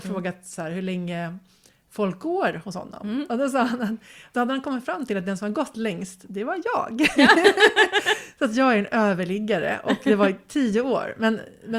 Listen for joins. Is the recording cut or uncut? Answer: uncut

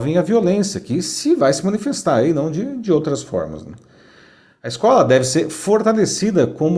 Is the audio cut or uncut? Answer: uncut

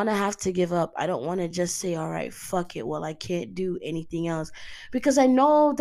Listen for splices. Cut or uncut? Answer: uncut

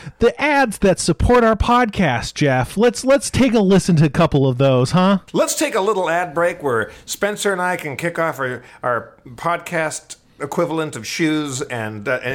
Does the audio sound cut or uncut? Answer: cut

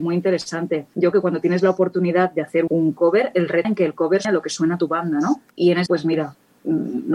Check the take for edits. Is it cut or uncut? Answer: cut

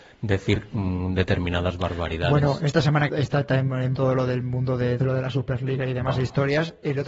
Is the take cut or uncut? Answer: cut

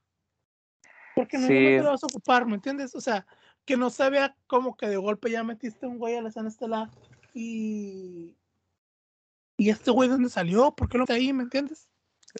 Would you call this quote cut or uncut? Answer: cut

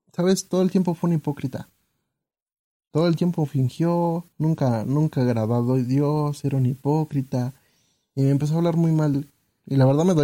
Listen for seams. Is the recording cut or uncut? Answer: cut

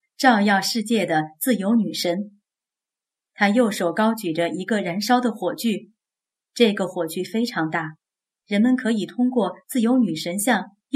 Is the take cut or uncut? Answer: uncut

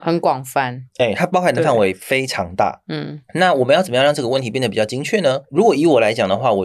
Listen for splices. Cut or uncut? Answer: uncut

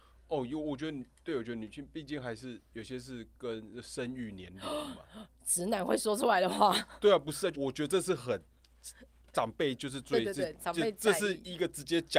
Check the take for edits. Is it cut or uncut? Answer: cut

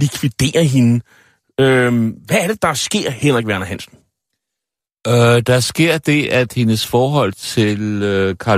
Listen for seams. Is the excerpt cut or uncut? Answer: cut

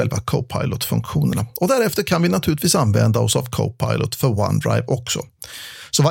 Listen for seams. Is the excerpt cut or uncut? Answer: uncut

